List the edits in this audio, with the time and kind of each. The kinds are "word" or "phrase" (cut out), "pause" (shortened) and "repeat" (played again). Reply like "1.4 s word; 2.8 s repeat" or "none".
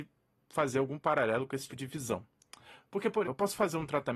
1.7 s word; 3.2 s word